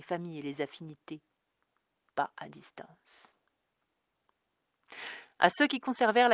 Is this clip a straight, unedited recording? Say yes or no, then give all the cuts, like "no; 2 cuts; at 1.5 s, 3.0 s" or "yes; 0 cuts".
no; 1 cut; at 2.1 s